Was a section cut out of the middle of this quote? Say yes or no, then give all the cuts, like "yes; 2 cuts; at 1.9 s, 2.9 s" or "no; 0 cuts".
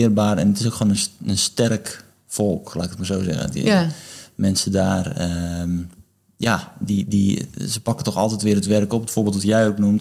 no; 0 cuts